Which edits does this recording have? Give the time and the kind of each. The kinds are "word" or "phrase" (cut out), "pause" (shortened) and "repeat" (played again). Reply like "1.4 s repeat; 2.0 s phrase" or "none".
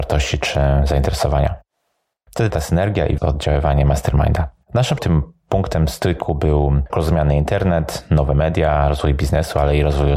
2.5 s word; 3.2 s phrase; 5.0 s word; 6.9 s word